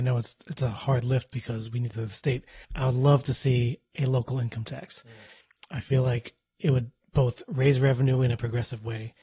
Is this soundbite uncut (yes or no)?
no